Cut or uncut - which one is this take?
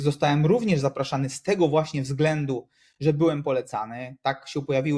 uncut